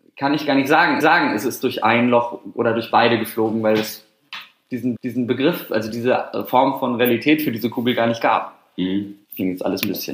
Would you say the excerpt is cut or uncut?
cut